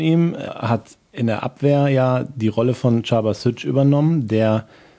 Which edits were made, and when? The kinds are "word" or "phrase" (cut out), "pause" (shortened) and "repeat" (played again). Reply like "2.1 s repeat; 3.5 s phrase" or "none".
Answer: none